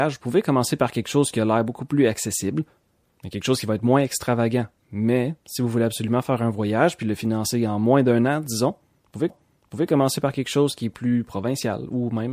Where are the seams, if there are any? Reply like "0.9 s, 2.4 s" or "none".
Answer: 9.3 s